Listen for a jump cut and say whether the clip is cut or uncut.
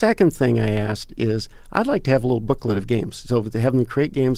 uncut